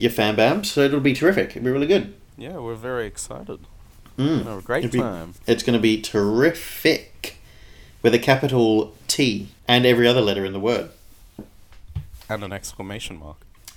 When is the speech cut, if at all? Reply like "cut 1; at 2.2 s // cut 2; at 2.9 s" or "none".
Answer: cut 1; at 2.2 s // cut 2; at 5.4 s // cut 3; at 9.6 s